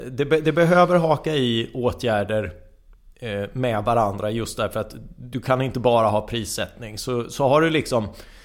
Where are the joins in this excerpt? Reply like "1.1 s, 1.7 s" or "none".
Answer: none

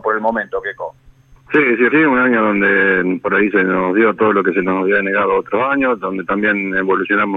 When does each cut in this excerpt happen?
1.9 s

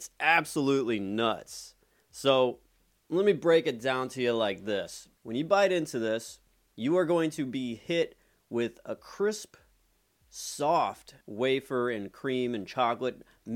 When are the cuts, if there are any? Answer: 5.2 s, 11.2 s

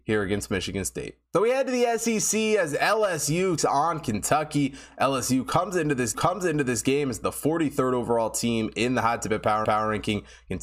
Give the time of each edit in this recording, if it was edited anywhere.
1.3 s, 3.6 s, 6.1 s, 9.6 s

